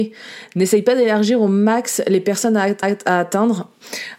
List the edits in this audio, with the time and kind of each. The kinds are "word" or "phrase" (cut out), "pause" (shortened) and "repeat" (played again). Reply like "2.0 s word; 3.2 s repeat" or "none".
2.8 s repeat